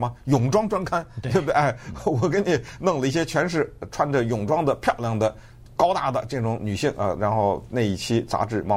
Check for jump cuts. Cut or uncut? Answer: uncut